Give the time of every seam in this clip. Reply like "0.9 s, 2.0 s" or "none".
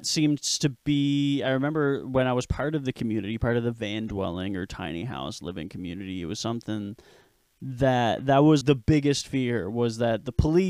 8.6 s